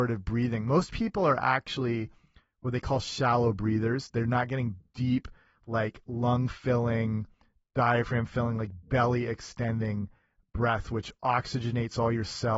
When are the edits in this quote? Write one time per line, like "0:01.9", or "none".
none

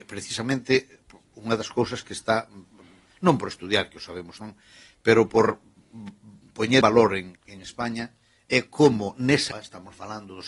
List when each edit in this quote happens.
0:04.4
0:06.8
0:07.4
0:09.5

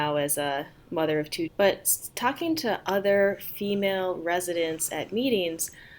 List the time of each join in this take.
0:01.5

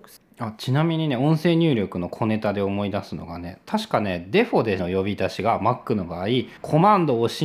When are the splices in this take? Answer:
0:04.8
0:06.6

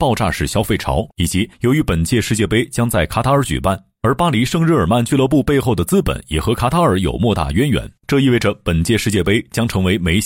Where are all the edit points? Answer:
0:01.1
0:01.5
0:08.0

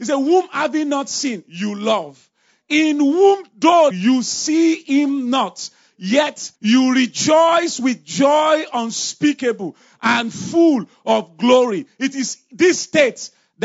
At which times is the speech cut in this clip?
0:03.9
0:06.6

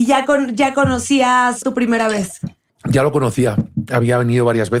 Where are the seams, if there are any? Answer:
0:01.6
0:02.7

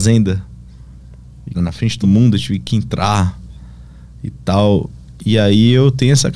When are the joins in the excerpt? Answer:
0:01.5
0:02.0

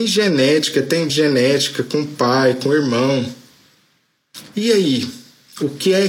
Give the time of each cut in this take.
0:01.1

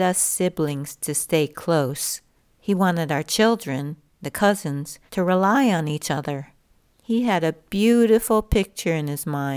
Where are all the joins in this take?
0:02.4
0:05.1
0:06.6

